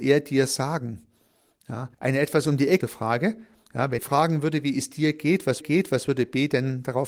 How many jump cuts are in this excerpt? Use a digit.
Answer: 4